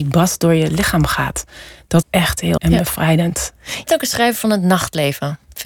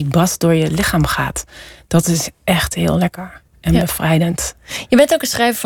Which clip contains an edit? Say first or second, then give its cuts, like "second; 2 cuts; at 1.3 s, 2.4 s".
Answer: first; 3 cuts; at 2.0 s, 2.6 s, 3.9 s